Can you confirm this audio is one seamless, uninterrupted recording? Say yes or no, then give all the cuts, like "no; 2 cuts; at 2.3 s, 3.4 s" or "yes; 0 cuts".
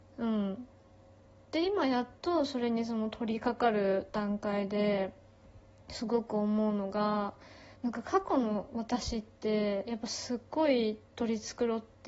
no; 2 cuts; at 5.7 s, 7.7 s